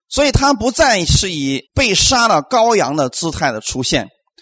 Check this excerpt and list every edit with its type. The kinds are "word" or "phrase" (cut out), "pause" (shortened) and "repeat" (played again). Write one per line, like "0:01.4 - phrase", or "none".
0:01.7 - pause